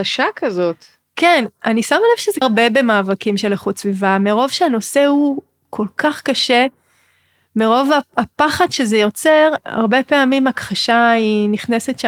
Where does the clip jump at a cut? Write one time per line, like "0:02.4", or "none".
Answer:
0:02.4
0:09.6

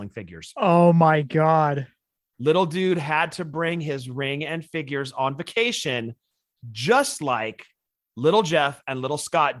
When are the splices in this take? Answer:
none

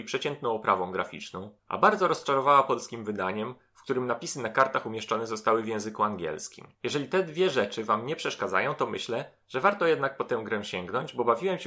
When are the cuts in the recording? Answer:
0:01.6
0:06.7

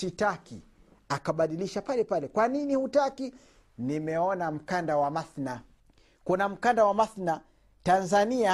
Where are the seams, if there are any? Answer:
0:05.8

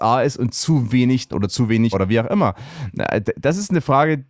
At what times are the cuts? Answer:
0:01.3
0:01.9

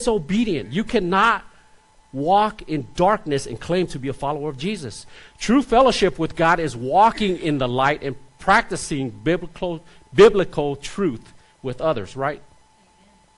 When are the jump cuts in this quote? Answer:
none

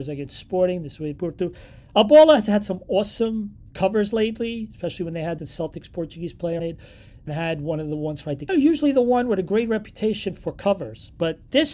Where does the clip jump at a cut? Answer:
0:01.2
0:03.7
0:05.4
0:06.6
0:07.3
0:08.5

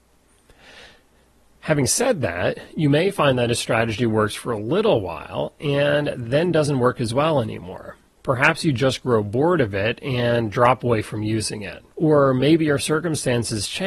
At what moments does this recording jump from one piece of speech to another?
0:08.1
0:11.9

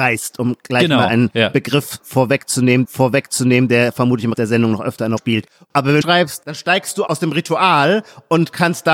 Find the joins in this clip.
0:02.8
0:04.3
0:05.2
0:06.0
0:07.1

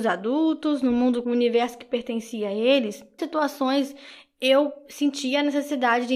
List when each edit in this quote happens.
0:01.2
0:03.2

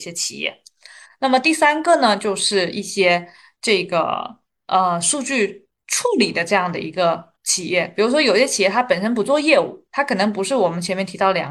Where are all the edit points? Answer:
0:07.4

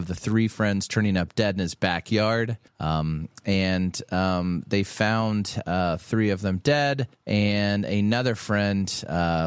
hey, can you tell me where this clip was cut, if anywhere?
0:02.7
0:07.1

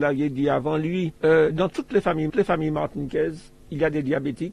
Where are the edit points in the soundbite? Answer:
0:01.2
0:02.3

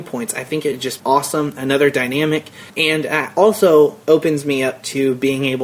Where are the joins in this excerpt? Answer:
0:01.0
0:02.7
0:04.0

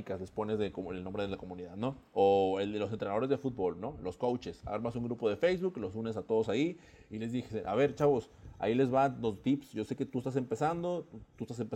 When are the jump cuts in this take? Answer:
none

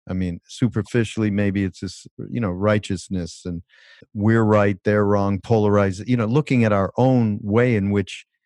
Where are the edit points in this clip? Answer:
0:04.0

